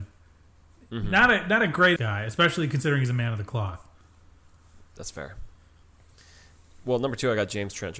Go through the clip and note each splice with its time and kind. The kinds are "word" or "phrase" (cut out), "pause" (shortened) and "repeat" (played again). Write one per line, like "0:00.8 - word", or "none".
0:02.0 - phrase
0:04.9 - pause